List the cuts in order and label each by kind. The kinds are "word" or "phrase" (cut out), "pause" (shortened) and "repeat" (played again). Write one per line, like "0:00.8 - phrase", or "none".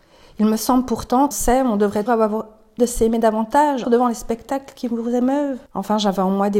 0:01.3 - phrase
0:02.1 - word
0:02.8 - word
0:03.8 - word
0:05.7 - pause